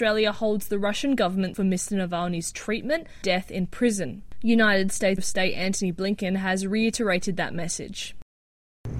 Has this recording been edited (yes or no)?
yes